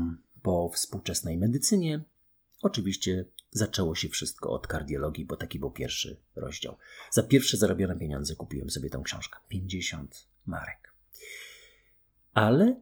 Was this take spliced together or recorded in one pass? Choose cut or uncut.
uncut